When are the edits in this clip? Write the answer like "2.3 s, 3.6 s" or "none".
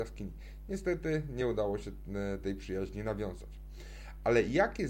none